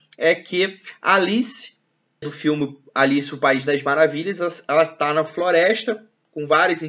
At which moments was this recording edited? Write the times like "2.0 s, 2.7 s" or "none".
2.2 s